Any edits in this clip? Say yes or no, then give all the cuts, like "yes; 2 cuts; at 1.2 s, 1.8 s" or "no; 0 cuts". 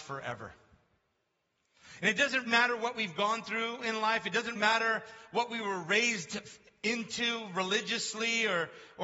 yes; 2 cuts; at 2.5 s, 4.5 s